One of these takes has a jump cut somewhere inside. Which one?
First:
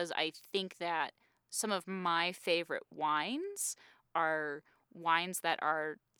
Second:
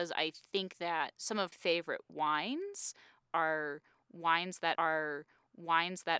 second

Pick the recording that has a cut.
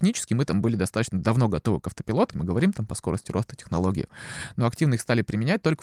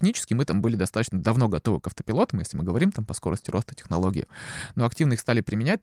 first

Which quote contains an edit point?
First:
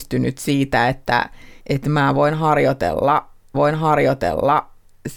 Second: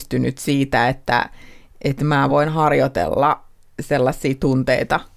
first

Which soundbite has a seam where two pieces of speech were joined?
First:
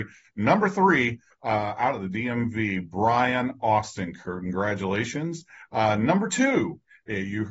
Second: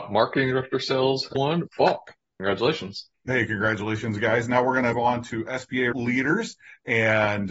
second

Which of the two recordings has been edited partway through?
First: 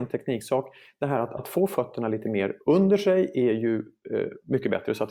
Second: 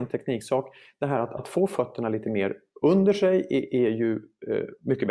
first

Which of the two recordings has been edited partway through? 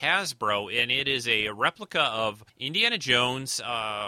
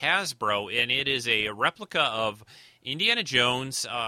first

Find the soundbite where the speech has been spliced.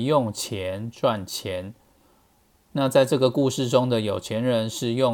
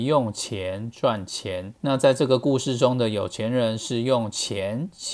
second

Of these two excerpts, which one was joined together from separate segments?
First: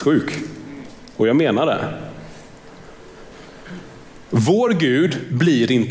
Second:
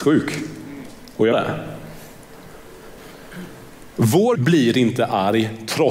second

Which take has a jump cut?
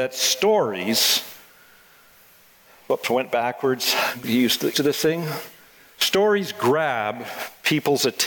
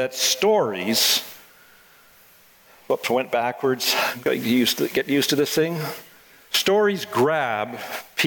first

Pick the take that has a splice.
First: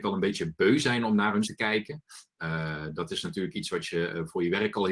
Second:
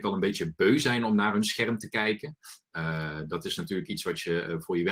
first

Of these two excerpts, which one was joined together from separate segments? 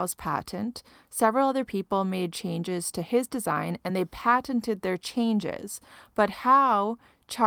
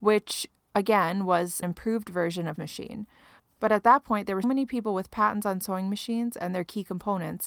second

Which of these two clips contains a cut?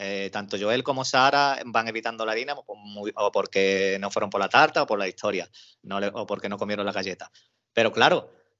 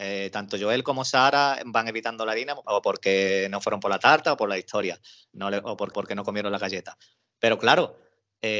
second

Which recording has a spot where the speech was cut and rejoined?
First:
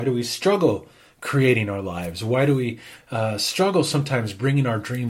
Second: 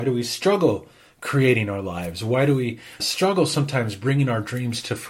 second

